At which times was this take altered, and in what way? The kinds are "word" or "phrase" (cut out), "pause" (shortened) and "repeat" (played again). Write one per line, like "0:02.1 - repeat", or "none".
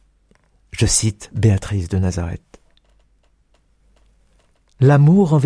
none